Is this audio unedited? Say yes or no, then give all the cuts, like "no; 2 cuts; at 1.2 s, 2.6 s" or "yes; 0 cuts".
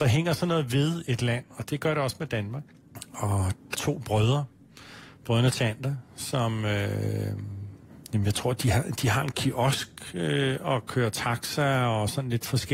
no; 1 cut; at 3.7 s